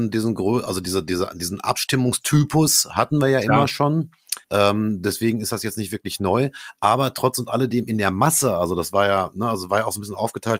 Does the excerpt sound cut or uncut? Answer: cut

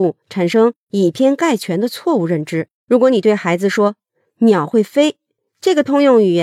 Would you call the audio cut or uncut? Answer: cut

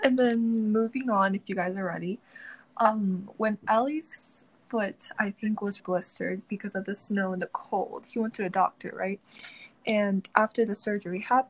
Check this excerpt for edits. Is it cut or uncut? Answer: cut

